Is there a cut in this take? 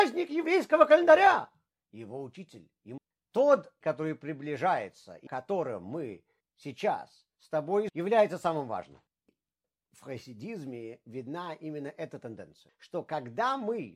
yes; 4 cuts; at 3.0 s, 3.8 s, 5.3 s, 7.9 s

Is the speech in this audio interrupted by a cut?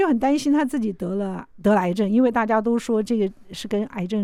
yes; 1 cut; at 1.5 s

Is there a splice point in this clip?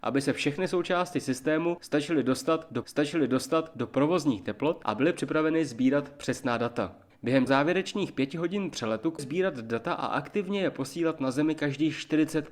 yes; 3 cuts; at 2.8 s, 7.5 s, 9.2 s

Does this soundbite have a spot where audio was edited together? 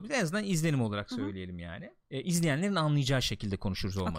yes; 1 cut; at 2.0 s

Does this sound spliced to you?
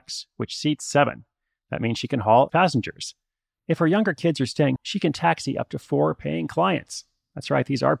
yes; 2 cuts; at 2.5 s, 4.8 s

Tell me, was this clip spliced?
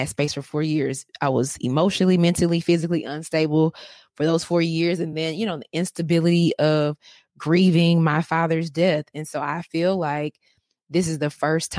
no; 0 cuts

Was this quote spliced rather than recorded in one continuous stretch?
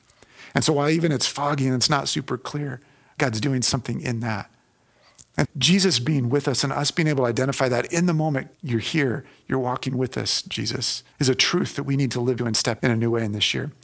yes; 6 cuts; at 3.2 s, 5.4 s, 8.5 s, 11.1 s, 12.4 s, 12.8 s

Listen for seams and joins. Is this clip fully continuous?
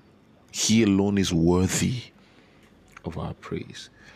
yes; 0 cuts

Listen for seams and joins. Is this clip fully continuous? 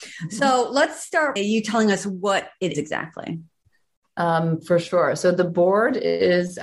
no; 2 cuts; at 1.4 s, 2.7 s

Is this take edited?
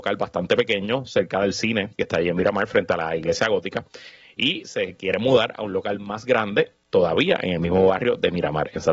no; 0 cuts

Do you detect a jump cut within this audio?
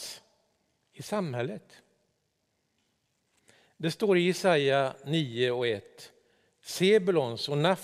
no; 0 cuts

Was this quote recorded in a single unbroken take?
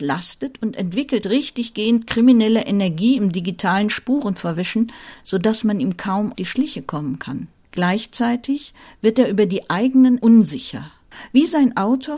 no; 2 cuts; at 6.3 s, 10.2 s

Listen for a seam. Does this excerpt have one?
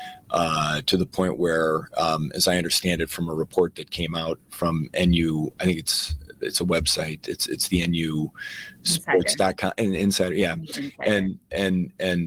no; 0 cuts

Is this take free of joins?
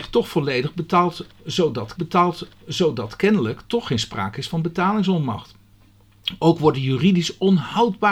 no; 1 cut; at 2.0 s

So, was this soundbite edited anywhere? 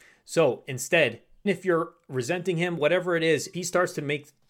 yes; 2 cuts; at 1.5 s, 3.5 s

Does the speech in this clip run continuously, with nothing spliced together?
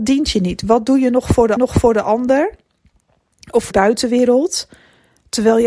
no; 2 cuts; at 1.6 s, 3.7 s

